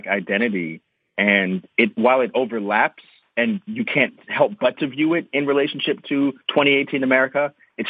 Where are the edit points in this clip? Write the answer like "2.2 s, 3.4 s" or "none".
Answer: 6.4 s

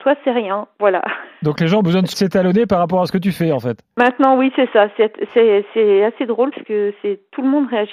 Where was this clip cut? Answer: 2.1 s, 6.5 s

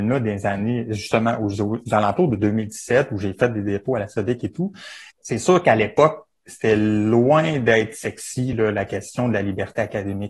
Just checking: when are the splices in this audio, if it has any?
none

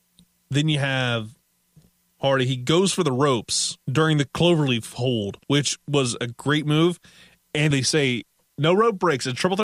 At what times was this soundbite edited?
3.8 s, 5.4 s, 7.7 s

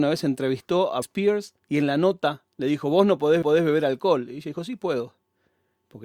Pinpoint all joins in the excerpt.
1.0 s, 1.6 s, 2.5 s, 3.4 s

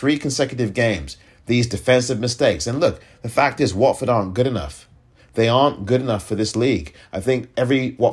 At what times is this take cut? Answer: none

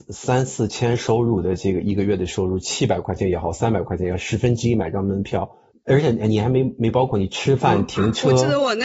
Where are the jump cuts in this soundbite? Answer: 5.7 s

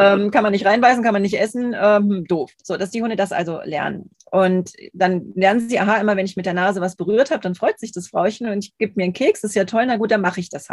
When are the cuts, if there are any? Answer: 2.6 s

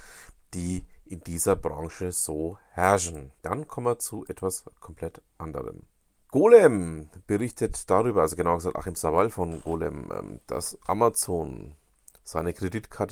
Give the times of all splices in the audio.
3.4 s, 6.2 s

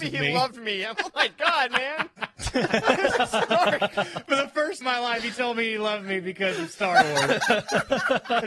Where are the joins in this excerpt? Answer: 0.9 s, 4.8 s

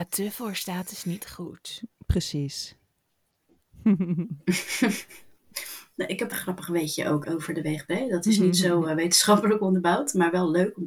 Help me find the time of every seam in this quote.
6.3 s, 7.2 s

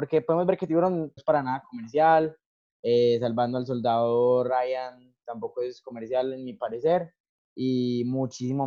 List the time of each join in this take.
1.2 s

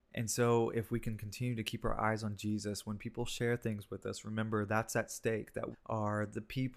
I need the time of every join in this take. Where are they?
5.7 s

